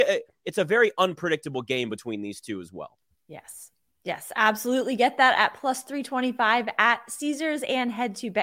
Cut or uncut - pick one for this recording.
uncut